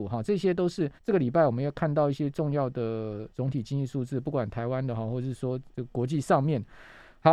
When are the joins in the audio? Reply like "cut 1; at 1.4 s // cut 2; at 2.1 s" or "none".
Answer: cut 1; at 1.0 s // cut 2; at 3.3 s // cut 3; at 5.7 s

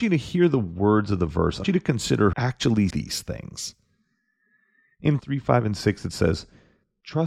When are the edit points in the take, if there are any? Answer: cut 1; at 1.6 s // cut 2; at 2.3 s // cut 3; at 2.9 s // cut 4; at 5.2 s

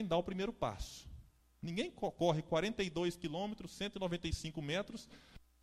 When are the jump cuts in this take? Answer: cut 1; at 1.4 s

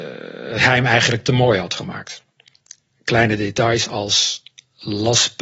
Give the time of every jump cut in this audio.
none

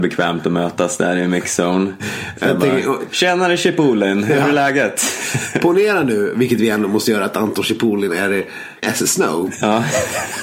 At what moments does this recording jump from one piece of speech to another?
cut 1; at 8.8 s

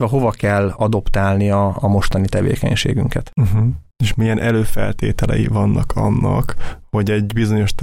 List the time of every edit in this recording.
cut 1; at 3.9 s

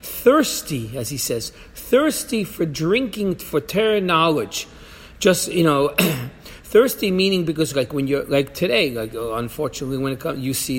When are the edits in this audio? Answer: none

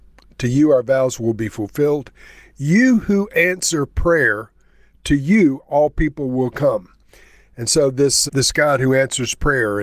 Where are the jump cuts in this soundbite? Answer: cut 1; at 8.3 s

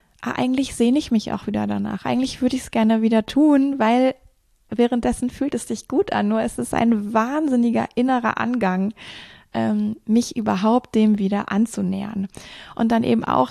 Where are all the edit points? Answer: none

